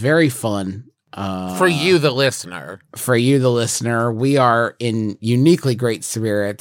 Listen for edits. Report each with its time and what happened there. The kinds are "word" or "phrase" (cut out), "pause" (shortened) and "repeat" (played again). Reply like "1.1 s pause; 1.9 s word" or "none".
2.9 s pause